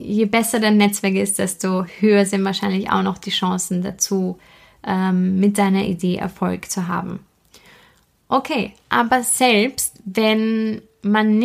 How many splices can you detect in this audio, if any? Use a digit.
0